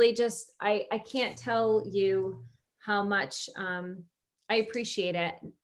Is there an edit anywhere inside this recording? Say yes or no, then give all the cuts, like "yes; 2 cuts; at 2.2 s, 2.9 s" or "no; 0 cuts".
no; 0 cuts